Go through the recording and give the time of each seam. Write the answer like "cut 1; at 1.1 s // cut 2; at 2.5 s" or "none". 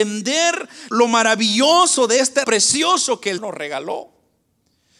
cut 1; at 0.9 s // cut 2; at 2.4 s // cut 3; at 3.4 s